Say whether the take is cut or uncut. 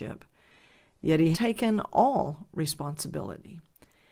cut